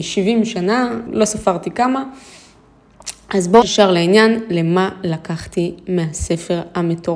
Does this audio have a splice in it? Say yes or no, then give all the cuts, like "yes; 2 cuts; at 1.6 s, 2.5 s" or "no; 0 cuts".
yes; 2 cuts; at 1.1 s, 3.6 s